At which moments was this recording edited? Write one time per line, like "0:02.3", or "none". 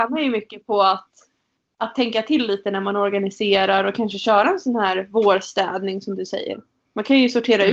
none